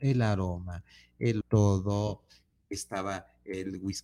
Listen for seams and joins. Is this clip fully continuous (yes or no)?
no